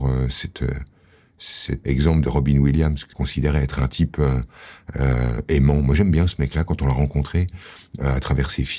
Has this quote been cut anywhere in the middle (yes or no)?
yes